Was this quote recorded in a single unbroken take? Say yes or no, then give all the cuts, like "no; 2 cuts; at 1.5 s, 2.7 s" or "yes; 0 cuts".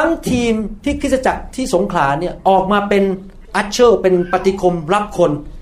no; 1 cut; at 3.4 s